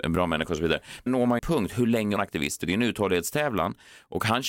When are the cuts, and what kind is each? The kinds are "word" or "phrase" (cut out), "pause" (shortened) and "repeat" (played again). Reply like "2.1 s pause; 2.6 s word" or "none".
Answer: 1.1 s word; 1.4 s phrase; 2.2 s phrase; 2.6 s phrase